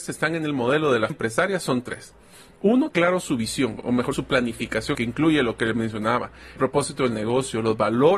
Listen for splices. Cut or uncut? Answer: cut